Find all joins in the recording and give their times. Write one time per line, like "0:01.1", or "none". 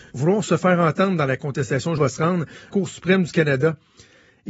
0:02.0
0:02.7